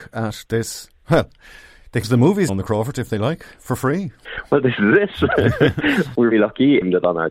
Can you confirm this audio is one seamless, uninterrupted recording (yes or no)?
no